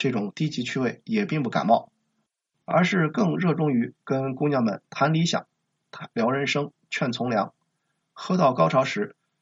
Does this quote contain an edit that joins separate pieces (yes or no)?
no